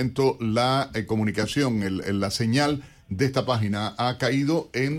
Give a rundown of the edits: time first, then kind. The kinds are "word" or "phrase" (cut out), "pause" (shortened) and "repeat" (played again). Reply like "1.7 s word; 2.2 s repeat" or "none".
none